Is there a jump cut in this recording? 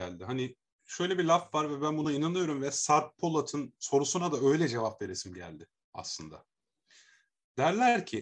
no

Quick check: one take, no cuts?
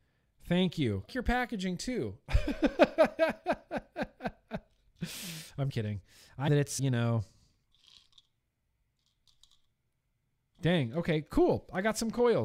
no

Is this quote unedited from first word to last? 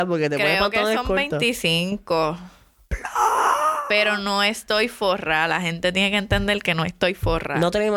yes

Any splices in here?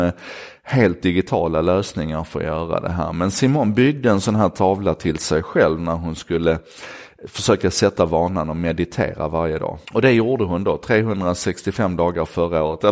yes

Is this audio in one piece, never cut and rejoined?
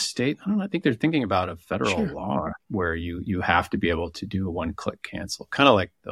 no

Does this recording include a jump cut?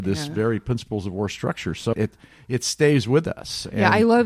yes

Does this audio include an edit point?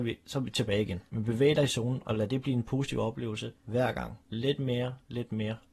yes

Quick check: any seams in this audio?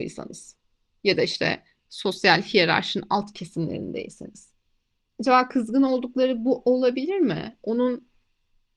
no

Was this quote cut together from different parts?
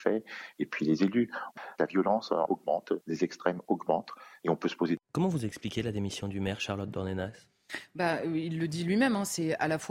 yes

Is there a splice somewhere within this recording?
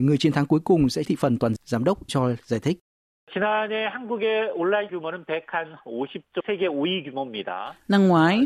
yes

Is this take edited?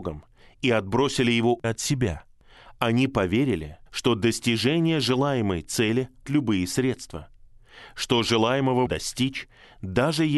yes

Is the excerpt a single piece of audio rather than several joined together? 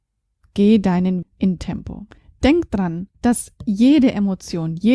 no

